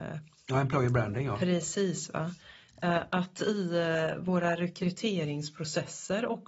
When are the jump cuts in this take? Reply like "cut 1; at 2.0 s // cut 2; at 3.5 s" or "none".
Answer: none